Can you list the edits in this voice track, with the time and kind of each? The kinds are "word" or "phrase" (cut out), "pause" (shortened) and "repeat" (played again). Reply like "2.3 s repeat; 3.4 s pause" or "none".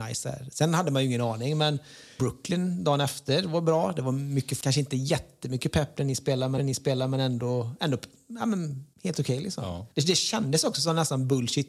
2.2 s word; 4.6 s word; 6.6 s repeat; 8.9 s pause; 9.9 s pause

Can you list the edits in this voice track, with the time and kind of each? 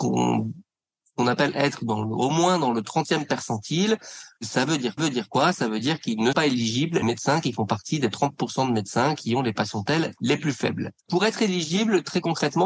5.0 s repeat; 6.3 s word; 7.0 s word; 11.0 s pause

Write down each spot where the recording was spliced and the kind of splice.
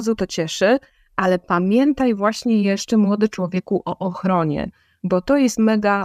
none

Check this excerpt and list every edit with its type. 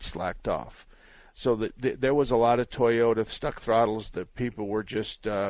none

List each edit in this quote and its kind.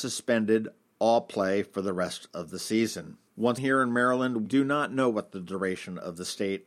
3.6 s word; 4.4 s word

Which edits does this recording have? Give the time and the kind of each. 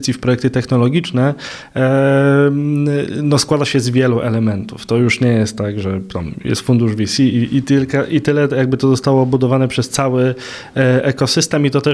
none

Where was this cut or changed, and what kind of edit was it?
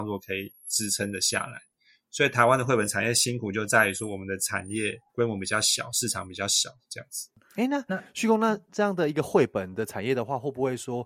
5.1 s pause

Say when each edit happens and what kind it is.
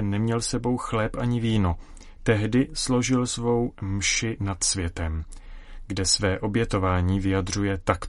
none

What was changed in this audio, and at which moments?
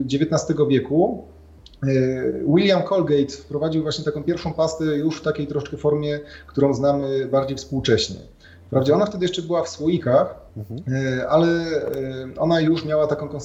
10.5 s pause

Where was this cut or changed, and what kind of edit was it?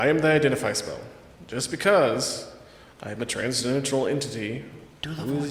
none

